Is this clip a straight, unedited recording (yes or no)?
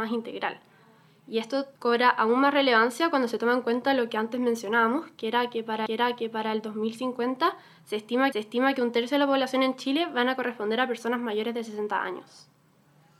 no